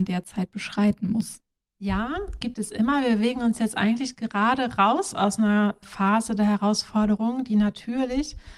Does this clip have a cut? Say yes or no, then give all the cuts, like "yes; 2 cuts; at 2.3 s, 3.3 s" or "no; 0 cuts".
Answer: no; 0 cuts